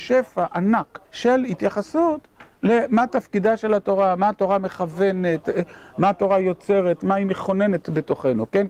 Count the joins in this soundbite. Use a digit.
1